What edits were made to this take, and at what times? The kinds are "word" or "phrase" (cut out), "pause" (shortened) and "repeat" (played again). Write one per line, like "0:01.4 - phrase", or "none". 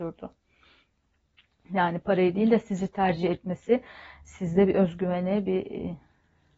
none